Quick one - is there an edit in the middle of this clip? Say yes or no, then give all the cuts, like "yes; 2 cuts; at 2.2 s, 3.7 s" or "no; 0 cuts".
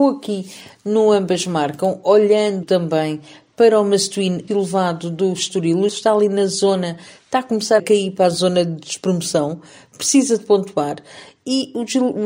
yes; 4 cuts; at 2.6 s, 4.5 s, 5.9 s, 7.8 s